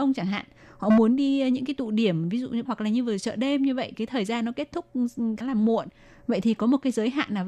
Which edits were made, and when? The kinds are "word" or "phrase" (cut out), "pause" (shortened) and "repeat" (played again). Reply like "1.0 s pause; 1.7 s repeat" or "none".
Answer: 2.6 s word; 3.9 s word; 5.4 s word